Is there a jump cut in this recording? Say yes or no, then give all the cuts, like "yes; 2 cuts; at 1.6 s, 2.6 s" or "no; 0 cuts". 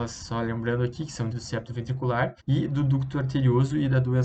yes; 2 cuts; at 1.3 s, 2.4 s